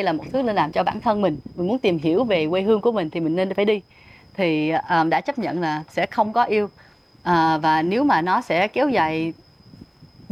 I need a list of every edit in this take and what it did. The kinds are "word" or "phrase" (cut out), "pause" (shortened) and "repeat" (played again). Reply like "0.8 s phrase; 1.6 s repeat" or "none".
none